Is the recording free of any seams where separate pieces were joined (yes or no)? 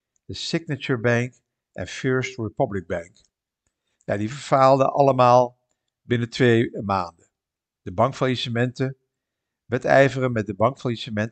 yes